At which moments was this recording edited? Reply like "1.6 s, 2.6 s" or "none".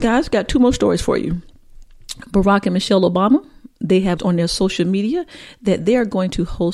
4.2 s